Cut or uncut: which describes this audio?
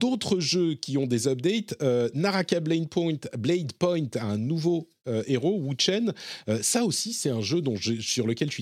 uncut